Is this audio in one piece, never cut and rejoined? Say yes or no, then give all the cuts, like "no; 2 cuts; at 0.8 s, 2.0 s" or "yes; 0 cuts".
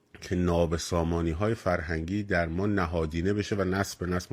yes; 0 cuts